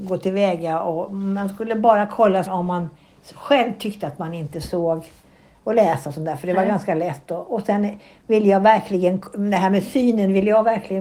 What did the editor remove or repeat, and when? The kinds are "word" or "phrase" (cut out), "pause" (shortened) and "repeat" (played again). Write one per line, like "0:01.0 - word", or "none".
0:02.5 - word